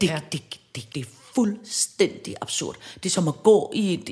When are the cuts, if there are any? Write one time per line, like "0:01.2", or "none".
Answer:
0:00.9